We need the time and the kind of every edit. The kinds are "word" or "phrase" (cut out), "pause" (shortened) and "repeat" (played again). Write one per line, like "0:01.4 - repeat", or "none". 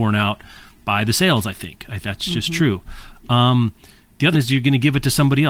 0:02.0 - word
0:04.3 - word